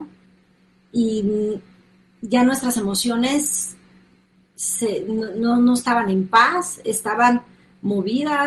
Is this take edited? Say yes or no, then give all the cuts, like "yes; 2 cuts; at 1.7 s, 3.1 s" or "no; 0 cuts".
no; 0 cuts